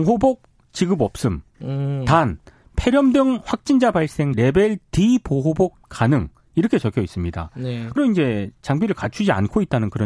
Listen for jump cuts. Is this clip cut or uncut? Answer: cut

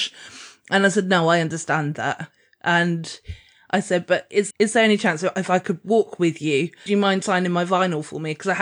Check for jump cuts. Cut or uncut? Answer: cut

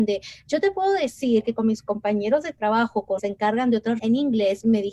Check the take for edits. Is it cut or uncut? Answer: cut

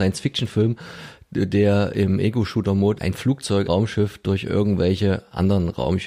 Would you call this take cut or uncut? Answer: cut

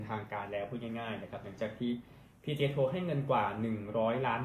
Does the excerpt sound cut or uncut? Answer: uncut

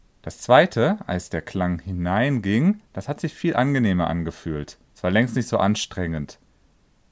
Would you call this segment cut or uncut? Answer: cut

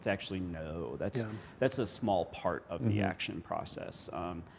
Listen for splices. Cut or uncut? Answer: uncut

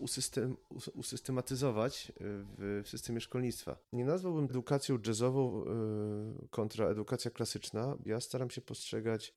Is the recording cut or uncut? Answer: cut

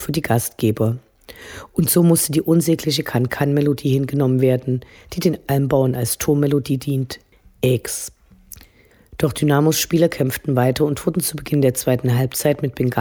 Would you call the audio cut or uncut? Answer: uncut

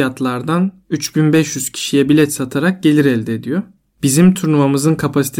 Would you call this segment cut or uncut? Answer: uncut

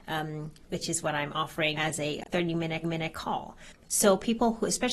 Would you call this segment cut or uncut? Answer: cut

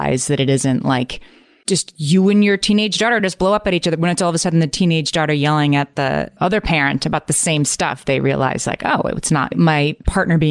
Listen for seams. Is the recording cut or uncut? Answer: uncut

